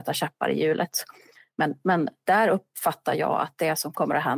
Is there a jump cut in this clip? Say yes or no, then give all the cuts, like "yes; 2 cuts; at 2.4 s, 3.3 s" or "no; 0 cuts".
no; 0 cuts